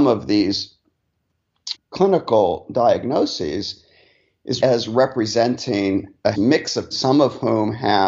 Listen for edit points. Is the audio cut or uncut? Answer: cut